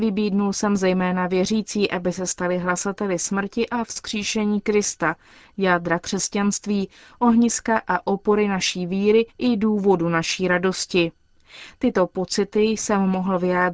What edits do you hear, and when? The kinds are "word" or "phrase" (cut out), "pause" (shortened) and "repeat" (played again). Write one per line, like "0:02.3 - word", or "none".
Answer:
0:09.3 - pause